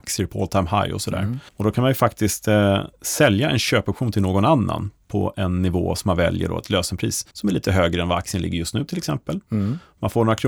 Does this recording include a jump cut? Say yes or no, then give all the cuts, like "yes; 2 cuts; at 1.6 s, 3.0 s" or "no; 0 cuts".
yes; 2 cuts; at 1.5 s, 7.3 s